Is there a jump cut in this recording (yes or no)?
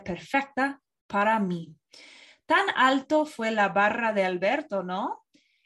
no